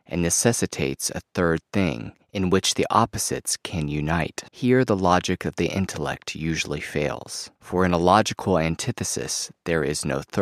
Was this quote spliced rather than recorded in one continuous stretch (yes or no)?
yes